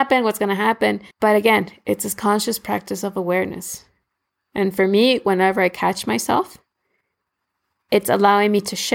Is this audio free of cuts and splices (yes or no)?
no